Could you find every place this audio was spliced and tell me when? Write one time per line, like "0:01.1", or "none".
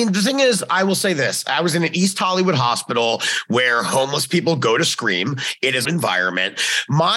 0:05.8